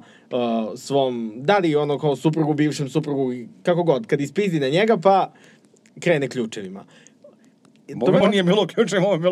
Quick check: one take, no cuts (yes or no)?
no